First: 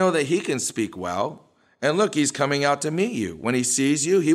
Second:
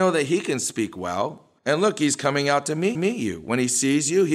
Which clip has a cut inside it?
second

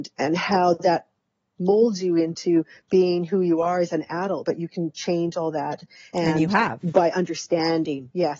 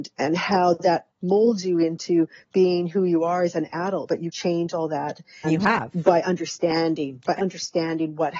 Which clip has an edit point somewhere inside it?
second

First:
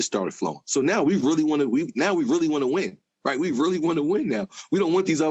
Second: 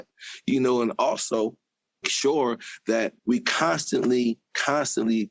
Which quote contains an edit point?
second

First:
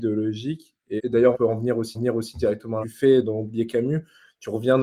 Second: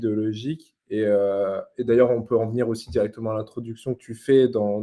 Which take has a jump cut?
first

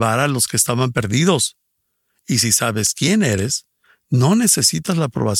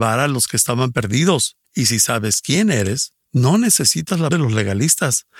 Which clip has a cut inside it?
second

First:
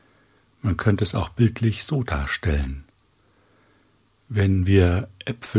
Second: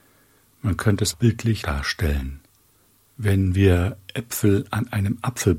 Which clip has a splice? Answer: second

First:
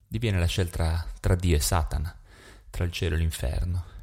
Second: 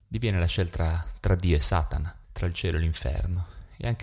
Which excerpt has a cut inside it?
second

